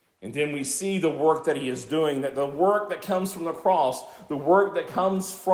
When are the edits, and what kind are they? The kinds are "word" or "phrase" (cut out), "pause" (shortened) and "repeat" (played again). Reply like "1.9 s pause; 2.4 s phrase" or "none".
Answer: none